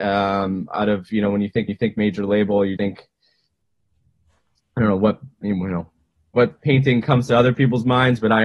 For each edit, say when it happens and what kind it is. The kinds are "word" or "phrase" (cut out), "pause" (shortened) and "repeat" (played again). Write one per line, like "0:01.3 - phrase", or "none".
0:01.7 - repeat
0:02.8 - word
0:06.6 - pause